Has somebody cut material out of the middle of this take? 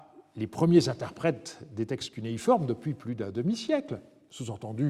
no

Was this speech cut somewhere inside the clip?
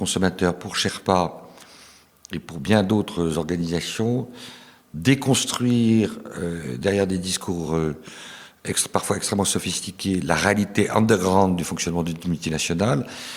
no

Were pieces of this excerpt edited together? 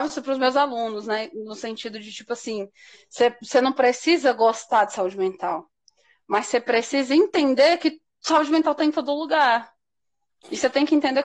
no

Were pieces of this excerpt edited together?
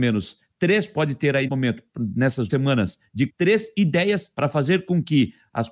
yes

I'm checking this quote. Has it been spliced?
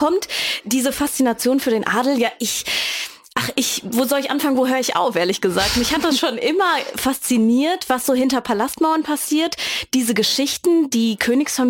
no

